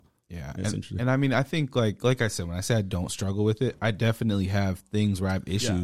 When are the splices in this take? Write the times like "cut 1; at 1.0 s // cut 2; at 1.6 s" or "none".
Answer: none